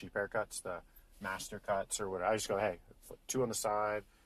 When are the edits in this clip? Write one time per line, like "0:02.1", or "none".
none